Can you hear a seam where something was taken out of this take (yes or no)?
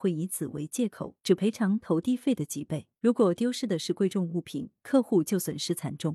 yes